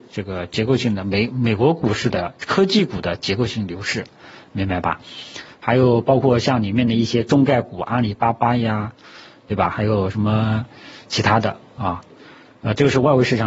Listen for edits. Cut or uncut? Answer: uncut